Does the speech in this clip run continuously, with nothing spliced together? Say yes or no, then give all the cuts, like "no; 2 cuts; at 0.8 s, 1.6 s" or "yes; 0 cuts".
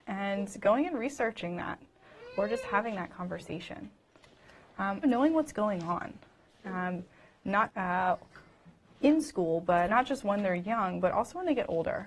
no; 3 cuts; at 5.0 s, 7.7 s, 9.9 s